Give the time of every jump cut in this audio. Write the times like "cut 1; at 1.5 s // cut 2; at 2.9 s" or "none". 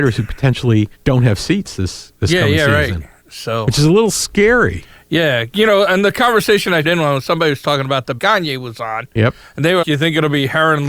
cut 1; at 0.9 s // cut 2; at 6.8 s // cut 3; at 8.2 s // cut 4; at 9.8 s